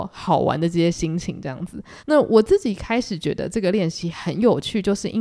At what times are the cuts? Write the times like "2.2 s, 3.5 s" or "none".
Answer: 2.0 s